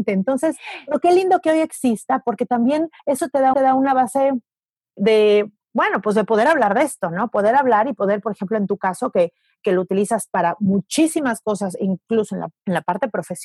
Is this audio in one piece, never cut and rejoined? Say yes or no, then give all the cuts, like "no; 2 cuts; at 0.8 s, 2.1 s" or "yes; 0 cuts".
no; 3 cuts; at 3.0 s, 3.5 s, 5.0 s